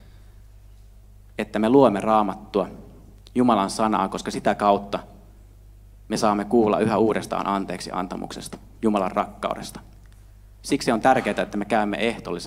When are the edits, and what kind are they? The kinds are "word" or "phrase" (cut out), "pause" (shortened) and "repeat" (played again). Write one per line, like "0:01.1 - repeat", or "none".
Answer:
none